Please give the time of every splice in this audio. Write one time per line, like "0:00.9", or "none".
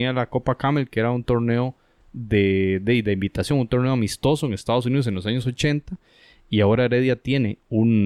none